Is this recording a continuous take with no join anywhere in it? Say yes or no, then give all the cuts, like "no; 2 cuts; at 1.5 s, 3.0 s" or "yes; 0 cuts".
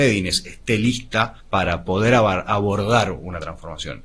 no; 1 cut; at 1.4 s